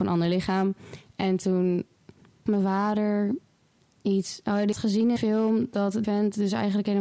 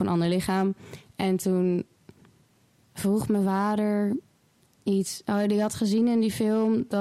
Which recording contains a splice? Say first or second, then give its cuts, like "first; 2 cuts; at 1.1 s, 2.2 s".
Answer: first; 4 cuts; at 2.5 s, 4.7 s, 5.2 s, 6.0 s